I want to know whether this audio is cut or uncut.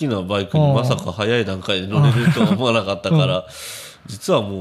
uncut